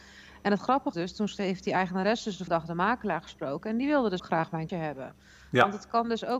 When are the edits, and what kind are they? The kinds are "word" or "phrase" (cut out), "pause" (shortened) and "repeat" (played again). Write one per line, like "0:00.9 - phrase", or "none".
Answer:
0:00.9 - word
0:01.4 - word
0:02.5 - word
0:04.2 - word
0:04.7 - word